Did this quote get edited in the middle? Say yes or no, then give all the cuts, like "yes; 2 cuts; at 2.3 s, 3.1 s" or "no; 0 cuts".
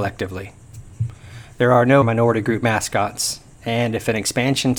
yes; 1 cut; at 2.0 s